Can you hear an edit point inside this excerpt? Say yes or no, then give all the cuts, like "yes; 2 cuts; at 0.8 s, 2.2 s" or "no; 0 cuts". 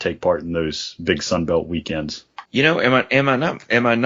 yes; 1 cut; at 2.4 s